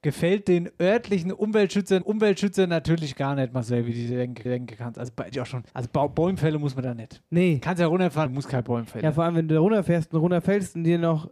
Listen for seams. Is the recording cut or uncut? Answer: cut